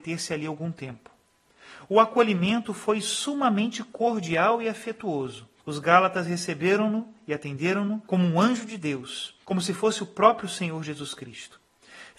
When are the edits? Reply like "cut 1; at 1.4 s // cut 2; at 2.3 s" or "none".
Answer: cut 1; at 5.6 s // cut 2; at 8.0 s // cut 3; at 9.4 s